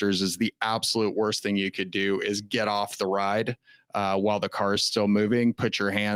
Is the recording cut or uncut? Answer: uncut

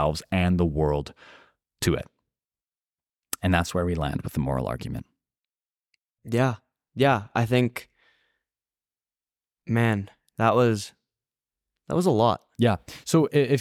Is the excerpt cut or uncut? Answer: uncut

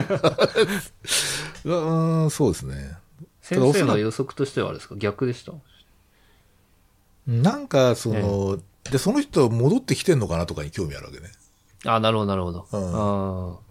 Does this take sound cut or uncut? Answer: uncut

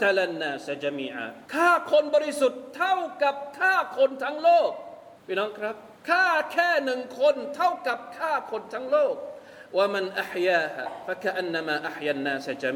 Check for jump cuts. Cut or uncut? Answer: cut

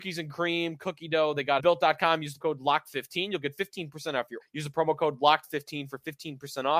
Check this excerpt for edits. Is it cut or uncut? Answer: cut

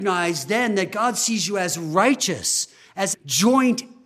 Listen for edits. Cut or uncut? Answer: cut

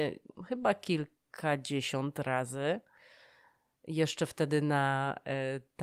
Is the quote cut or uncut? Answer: uncut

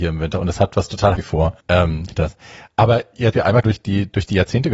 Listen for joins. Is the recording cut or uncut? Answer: cut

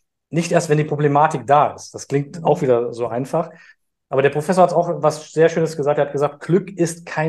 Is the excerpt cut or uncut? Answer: uncut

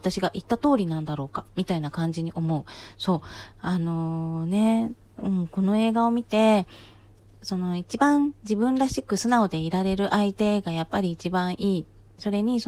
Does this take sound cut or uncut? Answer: uncut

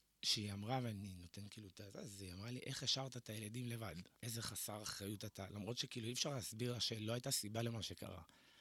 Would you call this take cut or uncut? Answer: cut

